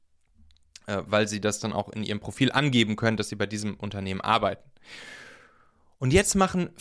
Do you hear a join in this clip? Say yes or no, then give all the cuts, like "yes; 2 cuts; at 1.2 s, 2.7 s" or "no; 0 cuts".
no; 0 cuts